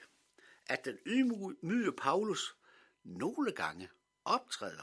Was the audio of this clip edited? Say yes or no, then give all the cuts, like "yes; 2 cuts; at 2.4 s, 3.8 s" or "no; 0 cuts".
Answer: no; 0 cuts